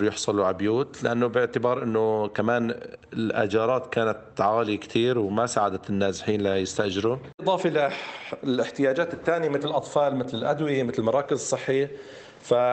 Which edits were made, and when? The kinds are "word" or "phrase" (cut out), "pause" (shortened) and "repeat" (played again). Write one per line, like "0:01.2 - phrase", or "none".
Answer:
0:09.6 - word